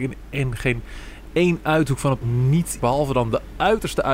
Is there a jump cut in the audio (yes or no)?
yes